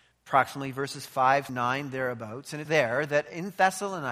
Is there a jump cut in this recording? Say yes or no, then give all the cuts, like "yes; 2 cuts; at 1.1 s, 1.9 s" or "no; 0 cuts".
yes; 2 cuts; at 1.5 s, 2.7 s